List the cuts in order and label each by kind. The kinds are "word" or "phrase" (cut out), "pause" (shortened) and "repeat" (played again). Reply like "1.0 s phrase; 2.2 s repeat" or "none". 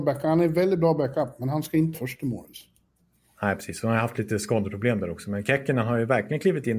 1.9 s word